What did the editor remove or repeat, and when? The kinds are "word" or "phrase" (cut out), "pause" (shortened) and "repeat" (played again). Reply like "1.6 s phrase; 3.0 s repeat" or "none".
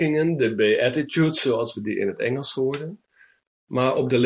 none